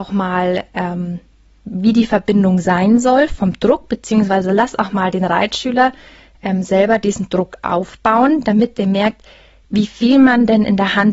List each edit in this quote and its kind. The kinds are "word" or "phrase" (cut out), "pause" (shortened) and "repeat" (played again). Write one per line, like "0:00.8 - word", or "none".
none